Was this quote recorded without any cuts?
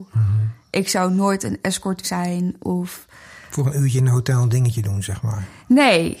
no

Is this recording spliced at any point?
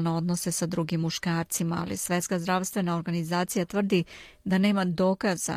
no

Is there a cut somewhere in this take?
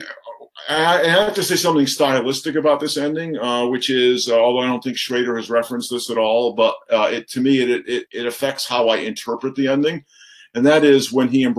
yes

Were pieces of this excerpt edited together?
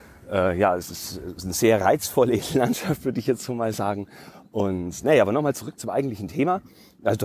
no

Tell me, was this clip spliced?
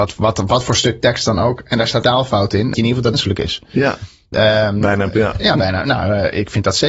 yes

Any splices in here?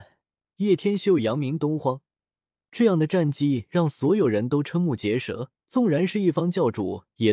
yes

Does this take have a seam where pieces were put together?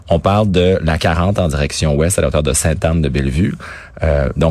no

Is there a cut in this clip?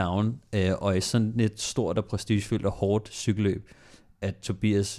no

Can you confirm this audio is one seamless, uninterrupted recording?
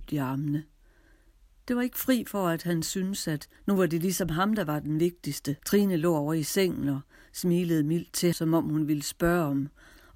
no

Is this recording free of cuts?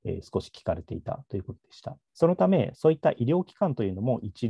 no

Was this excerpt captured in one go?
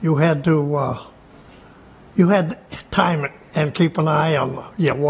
yes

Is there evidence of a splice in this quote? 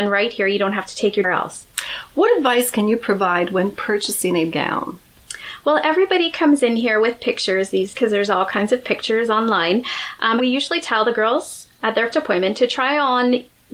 yes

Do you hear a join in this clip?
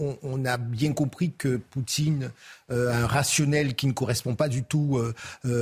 no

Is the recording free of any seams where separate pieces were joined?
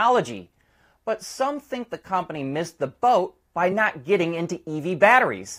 yes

